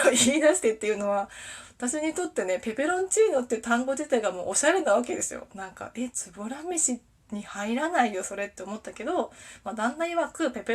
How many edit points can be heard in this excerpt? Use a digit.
0